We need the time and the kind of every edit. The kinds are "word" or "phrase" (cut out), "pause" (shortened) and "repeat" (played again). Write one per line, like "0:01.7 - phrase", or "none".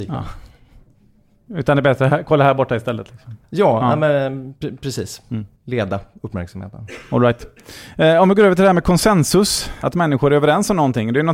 0:03.4 - pause